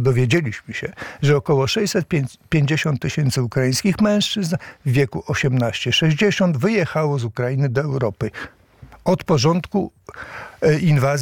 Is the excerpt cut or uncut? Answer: uncut